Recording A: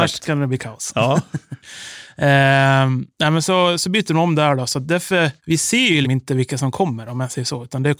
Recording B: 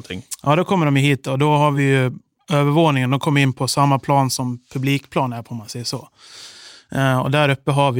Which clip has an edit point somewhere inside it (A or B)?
A